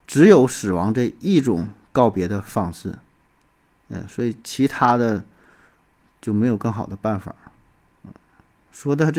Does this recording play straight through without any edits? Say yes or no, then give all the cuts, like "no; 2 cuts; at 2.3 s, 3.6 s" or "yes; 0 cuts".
yes; 0 cuts